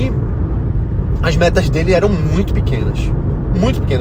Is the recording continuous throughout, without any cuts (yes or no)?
yes